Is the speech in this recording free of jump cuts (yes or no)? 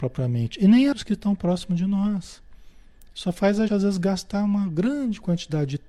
no